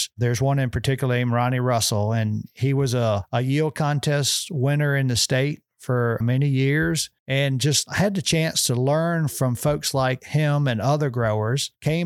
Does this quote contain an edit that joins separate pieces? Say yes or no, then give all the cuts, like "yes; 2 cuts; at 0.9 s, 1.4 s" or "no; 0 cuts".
yes; 2 cuts; at 6.2 s, 7.2 s